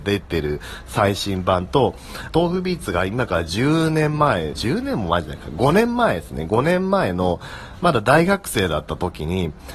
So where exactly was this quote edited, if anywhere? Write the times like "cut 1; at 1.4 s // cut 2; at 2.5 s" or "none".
cut 1; at 2.3 s // cut 2; at 4.5 s